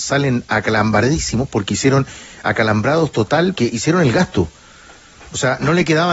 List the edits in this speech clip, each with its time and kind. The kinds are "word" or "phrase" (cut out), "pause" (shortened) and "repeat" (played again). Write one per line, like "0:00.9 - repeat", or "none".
0:03.6 - word